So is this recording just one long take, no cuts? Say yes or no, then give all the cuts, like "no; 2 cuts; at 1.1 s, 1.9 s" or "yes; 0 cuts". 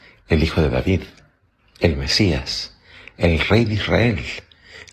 yes; 0 cuts